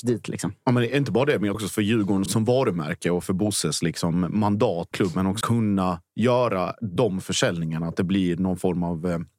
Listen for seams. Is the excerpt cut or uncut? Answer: cut